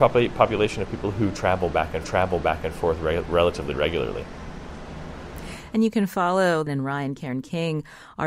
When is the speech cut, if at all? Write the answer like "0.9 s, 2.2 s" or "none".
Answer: 2.0 s, 6.7 s

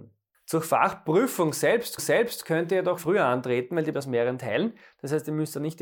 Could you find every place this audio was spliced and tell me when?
2.0 s, 3.0 s, 3.9 s

